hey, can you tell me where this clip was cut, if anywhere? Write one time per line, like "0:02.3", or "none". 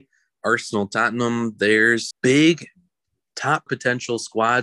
0:02.1
0:03.7